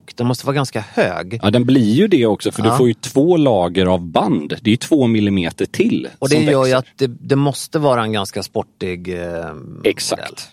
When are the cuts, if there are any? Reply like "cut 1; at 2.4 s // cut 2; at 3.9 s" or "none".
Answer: none